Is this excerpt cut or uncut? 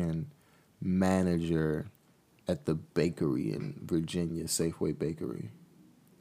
uncut